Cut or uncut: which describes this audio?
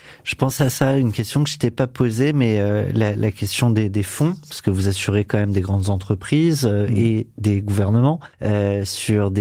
cut